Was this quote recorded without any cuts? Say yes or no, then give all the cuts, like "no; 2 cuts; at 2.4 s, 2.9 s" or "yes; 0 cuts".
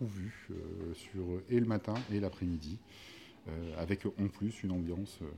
yes; 0 cuts